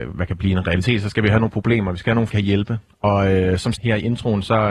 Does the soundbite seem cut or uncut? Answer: cut